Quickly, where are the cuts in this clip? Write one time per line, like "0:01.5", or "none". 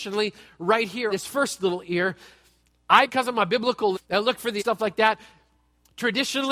0:01.1
0:03.1
0:03.9
0:04.6